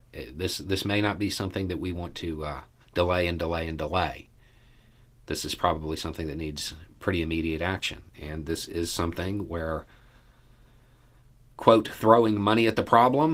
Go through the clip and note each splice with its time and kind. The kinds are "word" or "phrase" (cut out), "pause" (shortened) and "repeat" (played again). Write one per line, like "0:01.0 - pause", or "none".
0:02.8 - pause
0:08.1 - pause